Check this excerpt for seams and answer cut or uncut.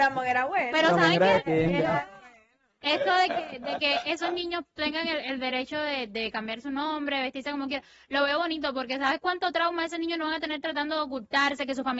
uncut